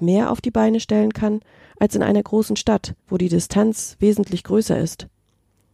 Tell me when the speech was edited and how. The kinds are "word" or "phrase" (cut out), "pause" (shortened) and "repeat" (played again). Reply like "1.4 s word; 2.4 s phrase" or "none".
3.0 s pause